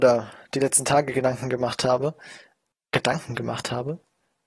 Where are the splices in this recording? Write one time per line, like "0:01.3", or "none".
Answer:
none